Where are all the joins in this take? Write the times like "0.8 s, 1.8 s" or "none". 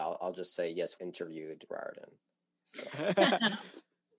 1.0 s, 1.7 s